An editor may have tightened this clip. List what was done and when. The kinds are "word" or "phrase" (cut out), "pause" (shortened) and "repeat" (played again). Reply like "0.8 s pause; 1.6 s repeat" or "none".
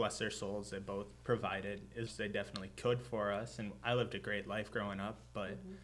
2.1 s word